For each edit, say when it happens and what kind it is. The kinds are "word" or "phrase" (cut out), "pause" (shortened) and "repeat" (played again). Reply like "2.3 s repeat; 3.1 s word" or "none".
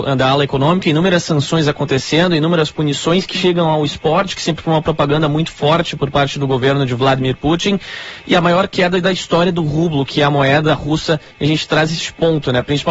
3.3 s word